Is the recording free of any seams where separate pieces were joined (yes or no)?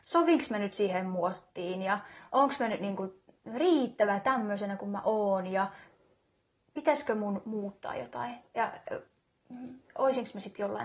yes